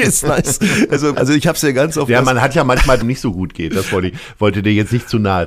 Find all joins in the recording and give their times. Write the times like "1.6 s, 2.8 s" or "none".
1.1 s, 3.0 s